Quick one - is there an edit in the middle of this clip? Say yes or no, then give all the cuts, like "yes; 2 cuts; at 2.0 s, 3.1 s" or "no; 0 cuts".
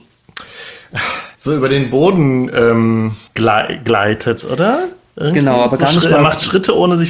yes; 2 cuts; at 1.3 s, 3.3 s